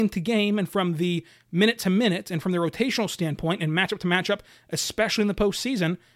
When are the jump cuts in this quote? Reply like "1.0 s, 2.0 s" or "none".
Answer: none

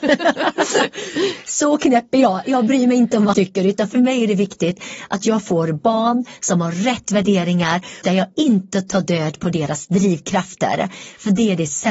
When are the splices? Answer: 3.3 s, 8.0 s

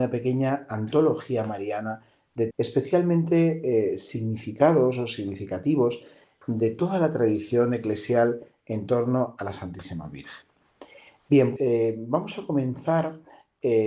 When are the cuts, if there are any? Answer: 2.5 s, 11.6 s

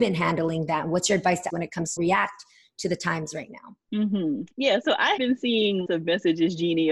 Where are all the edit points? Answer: 1.5 s, 2.0 s, 4.5 s, 5.2 s, 5.9 s

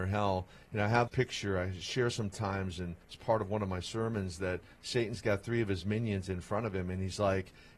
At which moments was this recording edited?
1.1 s, 3.0 s

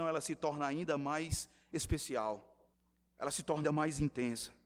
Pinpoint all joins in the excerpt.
2.7 s, 3.6 s

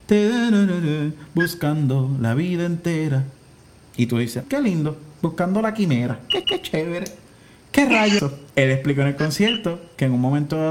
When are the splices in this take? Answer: 4.4 s, 6.4 s, 8.2 s, 8.5 s

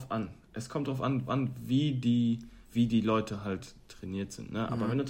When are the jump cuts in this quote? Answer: 1.3 s, 2.6 s

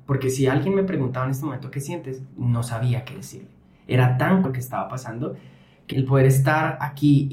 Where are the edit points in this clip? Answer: 2.3 s, 4.4 s, 5.9 s

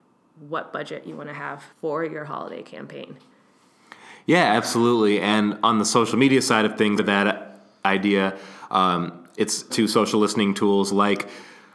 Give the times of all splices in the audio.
1.7 s, 7.0 s, 9.7 s

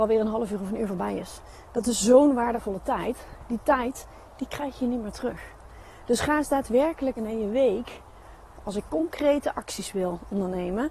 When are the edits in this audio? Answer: 7.2 s, 8.6 s

